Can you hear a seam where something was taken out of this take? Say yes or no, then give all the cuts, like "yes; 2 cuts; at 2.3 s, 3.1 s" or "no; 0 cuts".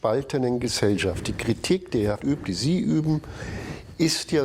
yes; 1 cut; at 2.2 s